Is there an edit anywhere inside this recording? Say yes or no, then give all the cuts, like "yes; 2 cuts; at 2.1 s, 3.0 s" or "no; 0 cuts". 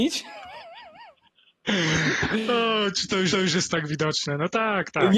yes; 1 cut; at 3.3 s